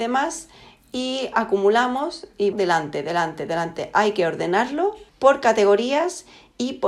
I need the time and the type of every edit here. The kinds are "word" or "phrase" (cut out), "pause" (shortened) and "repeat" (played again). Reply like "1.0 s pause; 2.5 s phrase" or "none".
2.5 s phrase; 5.1 s pause

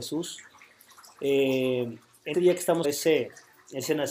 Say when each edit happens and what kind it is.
2.3 s word; 2.8 s word

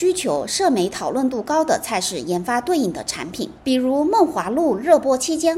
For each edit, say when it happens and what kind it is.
3.6 s pause

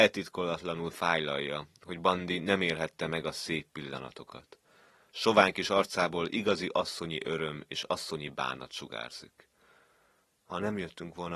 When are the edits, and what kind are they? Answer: none

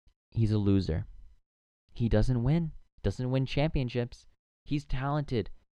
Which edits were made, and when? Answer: none

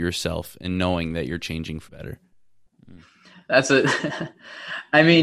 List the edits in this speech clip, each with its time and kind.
1.9 s word

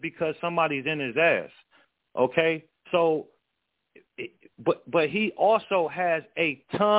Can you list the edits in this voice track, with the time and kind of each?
2.8 s pause

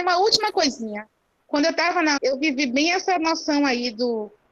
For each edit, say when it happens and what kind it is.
2.2 s word

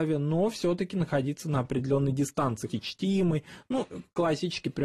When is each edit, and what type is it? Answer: 2.7 s word

